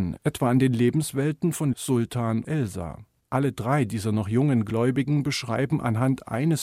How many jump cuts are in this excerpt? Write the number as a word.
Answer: two